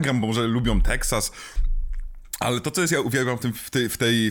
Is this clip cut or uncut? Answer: uncut